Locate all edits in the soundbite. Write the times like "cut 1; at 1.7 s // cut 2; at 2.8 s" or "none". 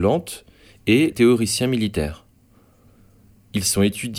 cut 1; at 1.1 s